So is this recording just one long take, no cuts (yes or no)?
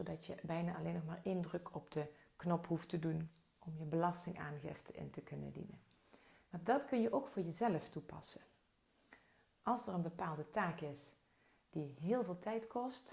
yes